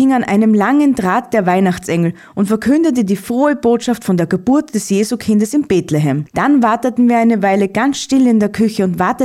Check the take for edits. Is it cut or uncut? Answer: uncut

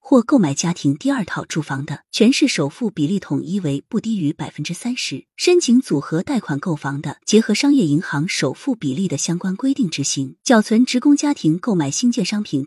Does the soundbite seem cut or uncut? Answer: cut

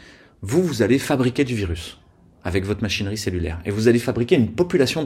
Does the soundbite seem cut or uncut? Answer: uncut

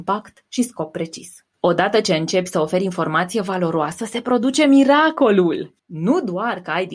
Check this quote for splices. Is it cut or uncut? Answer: cut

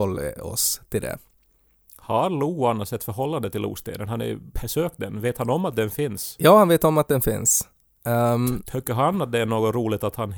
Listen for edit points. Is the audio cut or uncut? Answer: uncut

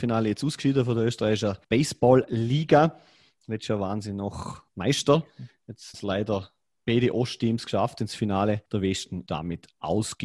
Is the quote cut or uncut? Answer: cut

